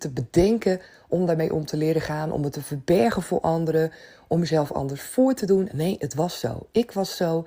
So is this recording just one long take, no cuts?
yes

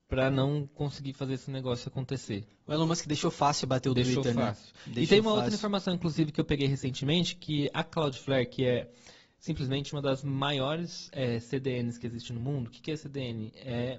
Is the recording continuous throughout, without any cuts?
yes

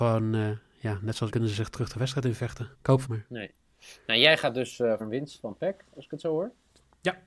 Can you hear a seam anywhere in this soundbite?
yes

